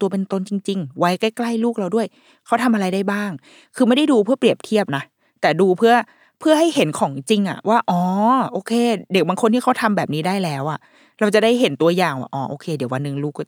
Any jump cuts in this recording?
no; 0 cuts

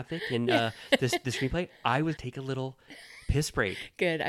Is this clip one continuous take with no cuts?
no; 1 cut; at 2.2 s

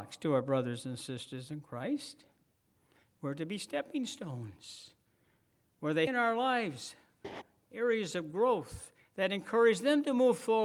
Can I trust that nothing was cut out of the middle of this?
no; 1 cut; at 6.1 s

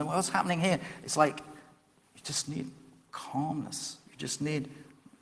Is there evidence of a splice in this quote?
no; 0 cuts

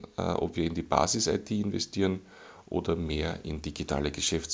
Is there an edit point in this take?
no; 0 cuts

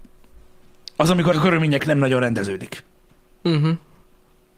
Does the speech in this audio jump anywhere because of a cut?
yes; 2 cuts; at 1.3 s, 1.8 s

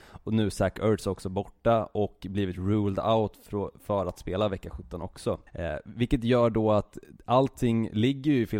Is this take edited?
yes; 1 cut; at 5.5 s

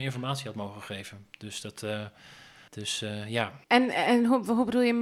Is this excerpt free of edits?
no; 2 cuts; at 2.7 s, 3.6 s

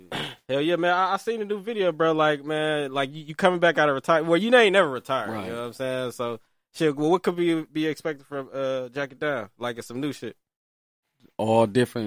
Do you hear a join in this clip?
no; 0 cuts

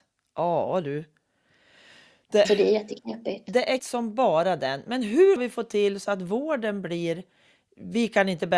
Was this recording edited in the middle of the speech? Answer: yes; 3 cuts; at 2.4 s, 3.8 s, 5.4 s

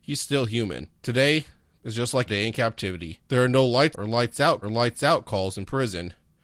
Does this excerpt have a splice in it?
yes; 5 cuts; at 1.0 s, 2.3 s, 3.2 s, 3.9 s, 4.6 s

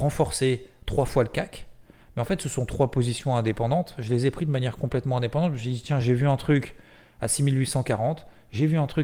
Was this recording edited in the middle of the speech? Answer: no; 0 cuts

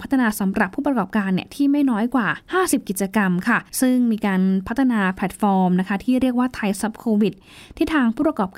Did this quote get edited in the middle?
yes; 1 cut; at 3.7 s

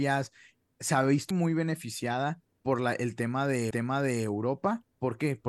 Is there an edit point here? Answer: yes; 2 cuts; at 1.3 s, 3.7 s

